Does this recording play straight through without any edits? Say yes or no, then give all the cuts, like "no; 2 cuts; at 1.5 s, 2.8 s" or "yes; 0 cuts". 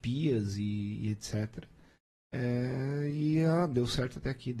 yes; 0 cuts